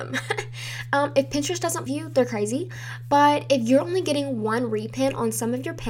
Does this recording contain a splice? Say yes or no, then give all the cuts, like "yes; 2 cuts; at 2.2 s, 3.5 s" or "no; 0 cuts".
yes; 1 cut; at 1.9 s